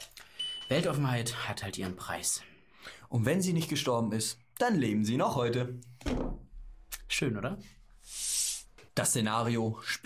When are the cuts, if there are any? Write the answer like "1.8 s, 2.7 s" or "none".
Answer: 8.9 s